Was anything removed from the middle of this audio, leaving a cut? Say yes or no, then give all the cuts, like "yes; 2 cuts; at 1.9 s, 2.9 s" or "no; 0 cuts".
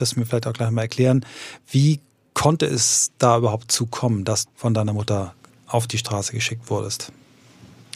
yes; 1 cut; at 4.5 s